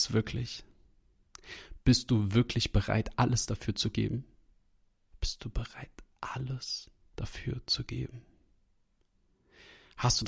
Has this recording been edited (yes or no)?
no